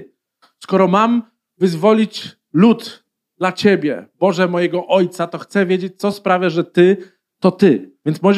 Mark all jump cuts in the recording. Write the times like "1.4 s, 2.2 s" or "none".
none